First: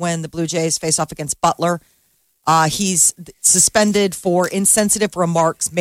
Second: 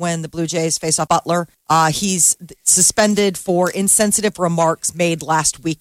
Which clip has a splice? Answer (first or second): second